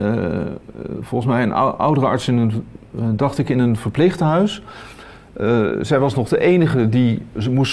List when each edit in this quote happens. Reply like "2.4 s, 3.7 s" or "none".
none